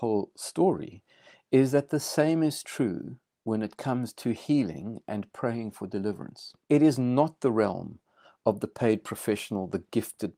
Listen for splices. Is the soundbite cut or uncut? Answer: cut